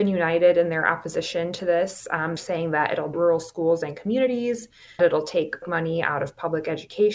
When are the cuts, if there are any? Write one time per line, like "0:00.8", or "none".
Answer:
0:02.4
0:03.1
0:05.0
0:05.6